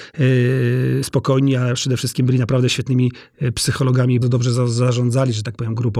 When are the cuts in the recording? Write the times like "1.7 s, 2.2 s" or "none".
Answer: 4.2 s